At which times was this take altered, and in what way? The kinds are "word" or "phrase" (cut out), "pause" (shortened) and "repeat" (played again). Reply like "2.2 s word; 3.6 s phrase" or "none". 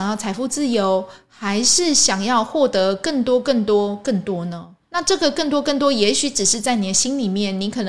4.8 s pause